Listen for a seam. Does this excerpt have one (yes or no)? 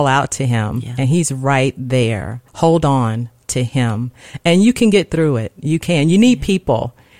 yes